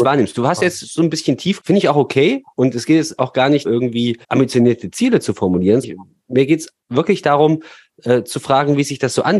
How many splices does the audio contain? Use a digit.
5